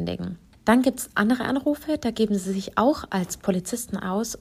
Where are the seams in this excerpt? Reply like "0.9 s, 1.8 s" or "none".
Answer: none